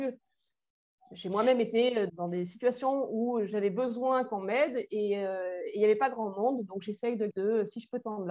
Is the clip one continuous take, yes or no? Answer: no